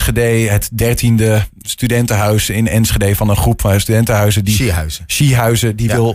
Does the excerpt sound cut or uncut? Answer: cut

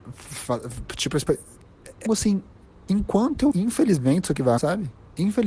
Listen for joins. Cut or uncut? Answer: cut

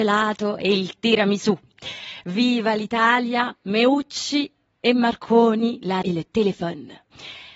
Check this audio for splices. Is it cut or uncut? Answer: cut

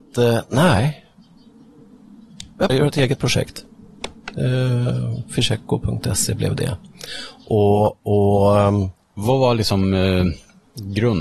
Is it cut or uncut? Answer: cut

